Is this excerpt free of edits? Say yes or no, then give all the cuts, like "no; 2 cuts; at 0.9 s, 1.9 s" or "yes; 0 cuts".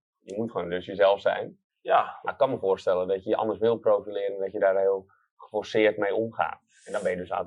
yes; 0 cuts